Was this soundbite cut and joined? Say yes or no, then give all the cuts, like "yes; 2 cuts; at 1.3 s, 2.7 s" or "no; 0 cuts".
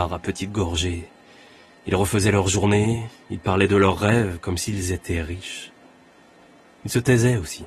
no; 0 cuts